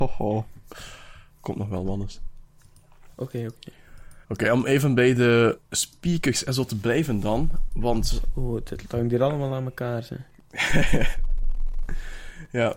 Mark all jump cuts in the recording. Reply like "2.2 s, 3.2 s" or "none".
4.2 s, 5.6 s

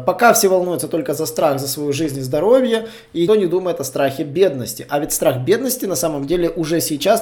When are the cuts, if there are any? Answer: 3.3 s

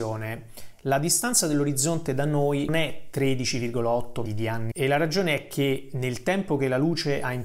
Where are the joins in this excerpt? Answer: 2.7 s, 4.3 s, 4.7 s

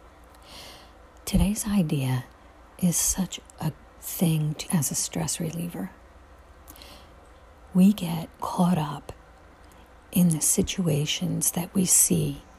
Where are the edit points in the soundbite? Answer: 3.8 s, 4.7 s, 8.4 s

